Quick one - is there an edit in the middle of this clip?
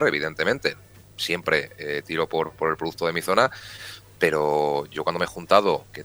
no; 0 cuts

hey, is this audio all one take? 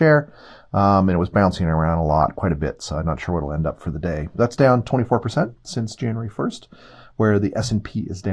yes; 0 cuts

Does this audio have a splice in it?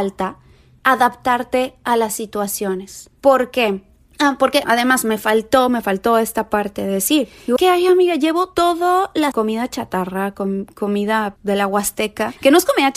yes; 5 cuts; at 3.1 s, 4.6 s, 7.6 s, 9.3 s, 11.4 s

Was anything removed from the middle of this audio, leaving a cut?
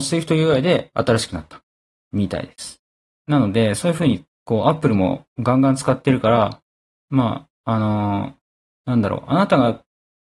no; 0 cuts

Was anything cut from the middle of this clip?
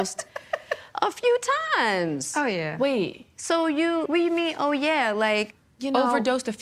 yes; 1 cut; at 4.1 s

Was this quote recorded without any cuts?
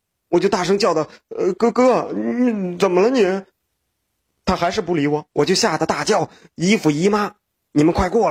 no; 2 cuts; at 3.5 s, 5.3 s

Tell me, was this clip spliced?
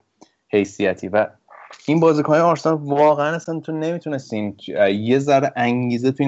no; 0 cuts

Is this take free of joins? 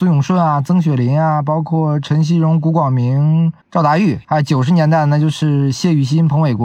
no; 2 cuts; at 3.6 s, 4.2 s

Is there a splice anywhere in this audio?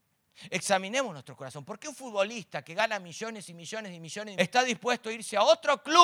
yes; 1 cut; at 4.4 s

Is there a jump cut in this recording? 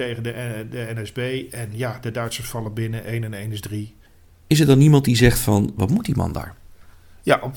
no; 0 cuts

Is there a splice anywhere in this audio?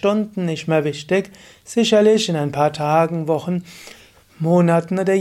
no; 0 cuts

